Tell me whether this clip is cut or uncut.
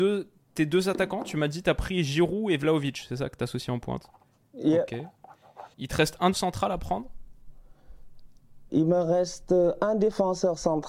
cut